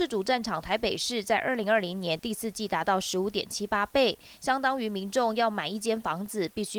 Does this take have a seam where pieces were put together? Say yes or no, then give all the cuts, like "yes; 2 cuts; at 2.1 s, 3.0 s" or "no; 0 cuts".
no; 0 cuts